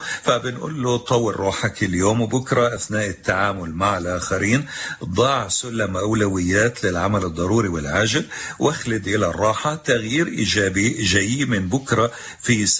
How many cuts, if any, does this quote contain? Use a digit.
0